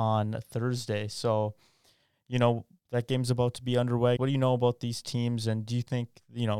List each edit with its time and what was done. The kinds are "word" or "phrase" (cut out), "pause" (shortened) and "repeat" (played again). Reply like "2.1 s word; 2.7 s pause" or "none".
4.2 s word